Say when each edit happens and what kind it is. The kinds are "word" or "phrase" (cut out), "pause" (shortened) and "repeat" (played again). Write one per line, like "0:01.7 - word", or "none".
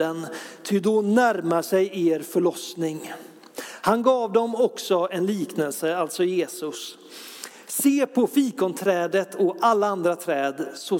none